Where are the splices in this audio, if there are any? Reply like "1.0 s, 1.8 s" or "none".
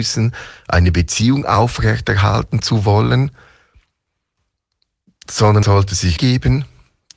5.6 s, 6.2 s